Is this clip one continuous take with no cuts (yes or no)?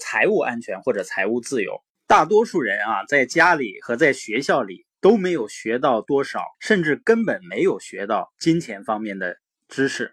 no